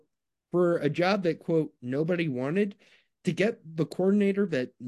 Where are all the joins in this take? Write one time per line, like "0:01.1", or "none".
none